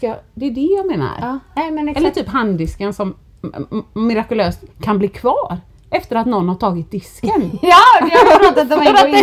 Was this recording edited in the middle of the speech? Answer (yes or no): yes